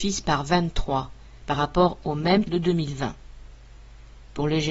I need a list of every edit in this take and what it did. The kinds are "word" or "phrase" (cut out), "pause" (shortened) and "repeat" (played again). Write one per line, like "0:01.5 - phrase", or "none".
0:01.4 - pause
0:02.4 - word